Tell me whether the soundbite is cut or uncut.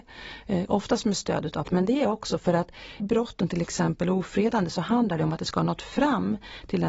cut